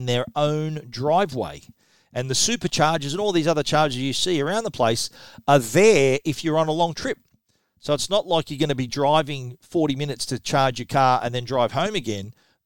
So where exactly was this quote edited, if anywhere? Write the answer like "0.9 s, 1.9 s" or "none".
none